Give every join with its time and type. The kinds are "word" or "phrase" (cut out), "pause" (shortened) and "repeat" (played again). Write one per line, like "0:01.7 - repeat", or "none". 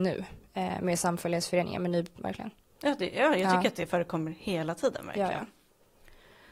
0:02.2 - phrase